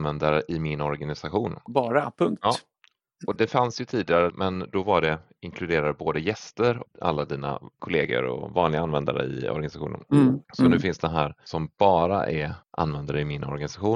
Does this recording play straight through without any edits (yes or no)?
no